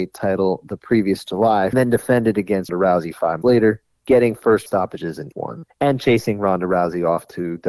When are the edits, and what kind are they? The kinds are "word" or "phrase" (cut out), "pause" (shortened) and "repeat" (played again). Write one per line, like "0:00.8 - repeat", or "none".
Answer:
0:01.7 - phrase
0:02.7 - word
0:03.4 - word
0:04.7 - word
0:05.3 - word
0:05.7 - pause

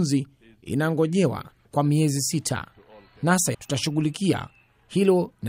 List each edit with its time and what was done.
0:01.6 - word
0:03.5 - word

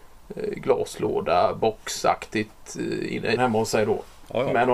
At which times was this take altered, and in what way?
0:03.4 - word

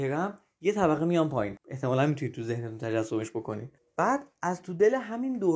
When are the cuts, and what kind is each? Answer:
0:01.6 - word
0:03.8 - pause

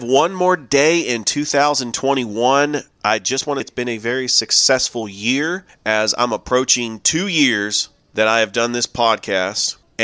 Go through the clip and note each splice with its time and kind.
0:03.6 - word
0:08.0 - pause

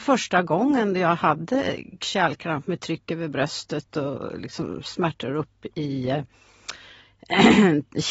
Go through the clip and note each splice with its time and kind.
0:02.0 - word

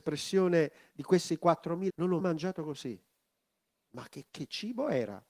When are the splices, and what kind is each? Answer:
0:01.9 - word
0:02.2 - word
0:04.3 - pause

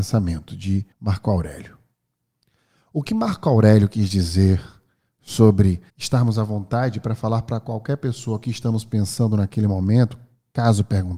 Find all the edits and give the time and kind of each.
0:00.9 - pause
0:05.9 - pause

